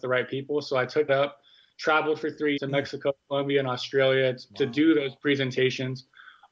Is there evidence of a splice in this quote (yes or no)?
yes